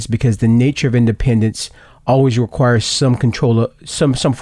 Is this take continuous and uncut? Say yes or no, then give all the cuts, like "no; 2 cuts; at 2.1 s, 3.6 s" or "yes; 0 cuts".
yes; 0 cuts